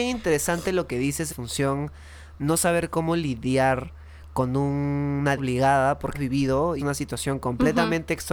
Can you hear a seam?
yes; 5 cuts; at 1.3 s, 2.4 s, 5.4 s, 6.1 s, 6.8 s

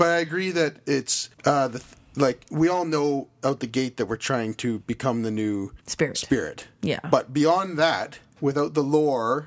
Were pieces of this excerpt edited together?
yes; 3 cuts; at 1.3 s, 5.8 s, 8.3 s

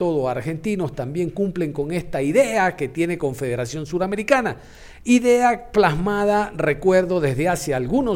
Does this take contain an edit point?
no; 0 cuts

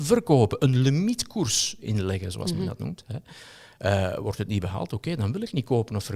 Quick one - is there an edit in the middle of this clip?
no; 0 cuts

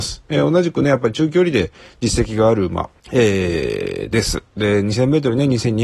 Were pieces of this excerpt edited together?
yes; 1 cut; at 3.0 s

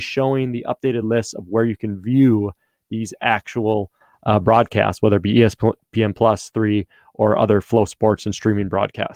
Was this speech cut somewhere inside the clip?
no; 0 cuts

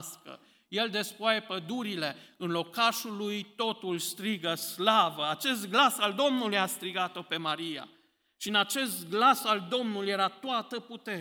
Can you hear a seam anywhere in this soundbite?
no; 0 cuts

